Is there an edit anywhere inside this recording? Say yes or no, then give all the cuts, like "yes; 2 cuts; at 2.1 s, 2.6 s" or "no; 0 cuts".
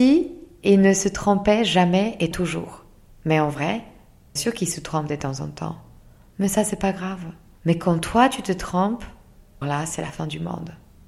yes; 3 cuts; at 2.3 s, 4.4 s, 9.6 s